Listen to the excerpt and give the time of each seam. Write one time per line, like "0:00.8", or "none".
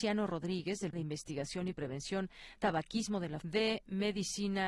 0:00.9
0:02.6
0:03.4